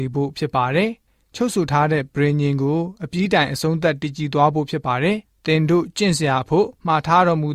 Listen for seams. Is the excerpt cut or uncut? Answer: uncut